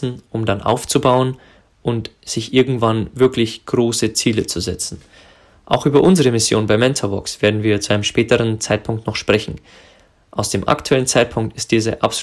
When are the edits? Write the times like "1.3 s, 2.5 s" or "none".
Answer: none